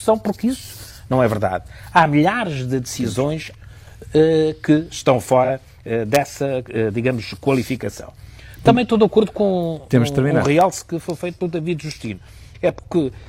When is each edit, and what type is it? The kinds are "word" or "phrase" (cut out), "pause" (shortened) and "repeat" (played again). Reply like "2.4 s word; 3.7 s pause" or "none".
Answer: 3.5 s phrase